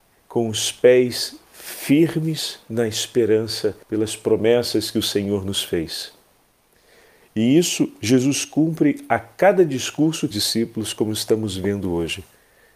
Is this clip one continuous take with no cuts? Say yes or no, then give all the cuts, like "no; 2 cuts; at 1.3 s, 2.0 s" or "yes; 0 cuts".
no; 2 cuts; at 3.8 s, 10.3 s